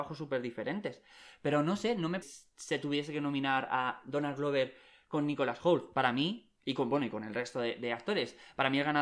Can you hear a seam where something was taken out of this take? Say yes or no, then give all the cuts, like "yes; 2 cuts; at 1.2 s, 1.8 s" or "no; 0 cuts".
yes; 2 cuts; at 2.2 s, 6.6 s